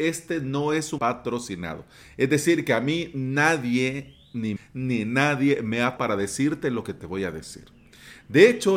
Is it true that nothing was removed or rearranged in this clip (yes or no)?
no